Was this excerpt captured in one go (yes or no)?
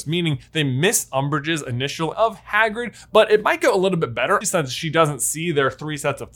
no